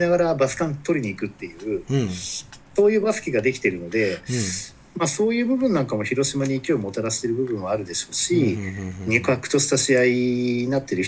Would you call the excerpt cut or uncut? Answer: uncut